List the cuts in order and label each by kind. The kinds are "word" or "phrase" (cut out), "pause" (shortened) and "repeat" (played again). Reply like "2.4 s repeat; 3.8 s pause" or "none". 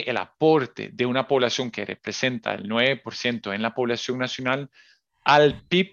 none